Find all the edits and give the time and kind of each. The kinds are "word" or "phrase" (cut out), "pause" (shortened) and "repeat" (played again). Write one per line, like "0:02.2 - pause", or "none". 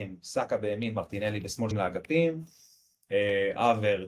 0:01.7 - word